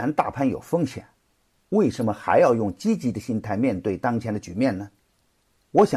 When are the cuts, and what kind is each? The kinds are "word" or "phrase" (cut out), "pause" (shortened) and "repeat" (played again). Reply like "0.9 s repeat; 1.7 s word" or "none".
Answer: none